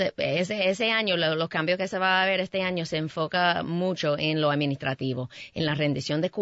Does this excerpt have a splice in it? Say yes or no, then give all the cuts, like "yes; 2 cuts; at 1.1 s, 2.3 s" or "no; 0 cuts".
no; 0 cuts